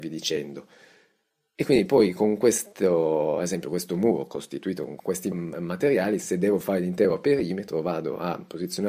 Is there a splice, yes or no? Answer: no